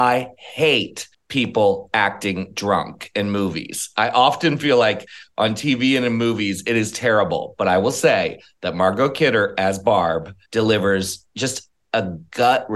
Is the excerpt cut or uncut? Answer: cut